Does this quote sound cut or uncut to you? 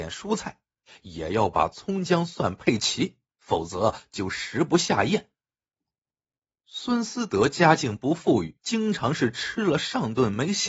cut